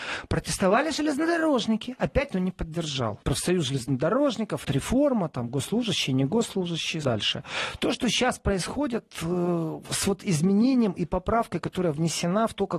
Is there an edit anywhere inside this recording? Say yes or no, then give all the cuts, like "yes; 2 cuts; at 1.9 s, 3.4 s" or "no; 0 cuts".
yes; 4 cuts; at 2.3 s, 3.2 s, 4.6 s, 7.0 s